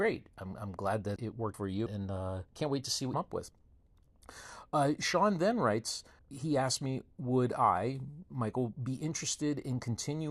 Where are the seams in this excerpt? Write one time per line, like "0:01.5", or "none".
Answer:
0:01.2
0:01.5
0:01.9
0:02.5
0:03.1
0:06.2